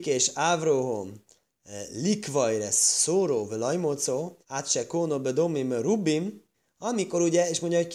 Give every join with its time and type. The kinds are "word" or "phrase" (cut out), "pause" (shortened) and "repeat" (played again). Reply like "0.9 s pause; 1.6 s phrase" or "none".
4.4 s pause; 6.5 s pause